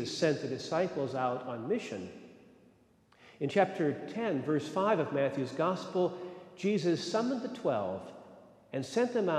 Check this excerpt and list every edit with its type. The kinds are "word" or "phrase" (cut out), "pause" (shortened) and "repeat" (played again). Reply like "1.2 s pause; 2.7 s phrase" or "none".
none